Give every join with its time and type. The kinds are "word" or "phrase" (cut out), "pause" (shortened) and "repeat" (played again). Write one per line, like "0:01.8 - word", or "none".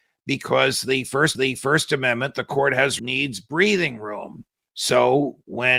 0:01.3 - repeat
0:03.0 - word
0:04.7 - pause